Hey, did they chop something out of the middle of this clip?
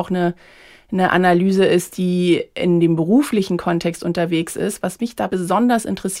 no; 0 cuts

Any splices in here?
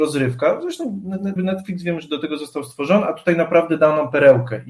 yes; 1 cut; at 1.4 s

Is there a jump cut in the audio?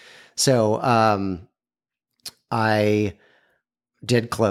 no; 0 cuts

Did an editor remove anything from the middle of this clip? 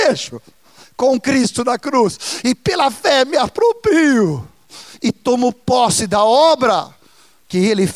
no; 0 cuts

